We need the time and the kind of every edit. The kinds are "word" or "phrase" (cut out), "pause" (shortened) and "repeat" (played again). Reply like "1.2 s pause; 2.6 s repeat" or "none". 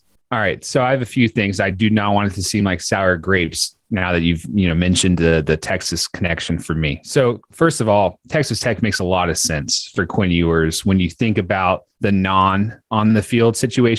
none